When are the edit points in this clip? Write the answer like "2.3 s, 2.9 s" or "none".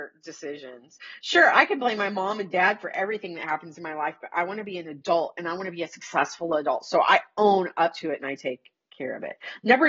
none